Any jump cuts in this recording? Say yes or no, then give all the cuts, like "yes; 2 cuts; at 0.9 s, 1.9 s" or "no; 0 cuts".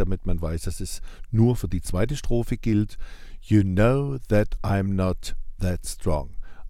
no; 0 cuts